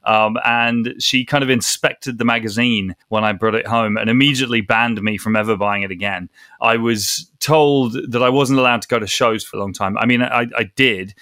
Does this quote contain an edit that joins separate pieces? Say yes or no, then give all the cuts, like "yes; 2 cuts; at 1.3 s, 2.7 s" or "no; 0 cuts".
yes; 2 cuts; at 3.0 s, 9.5 s